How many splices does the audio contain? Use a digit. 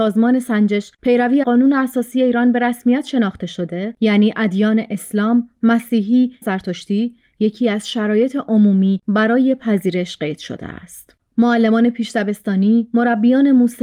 2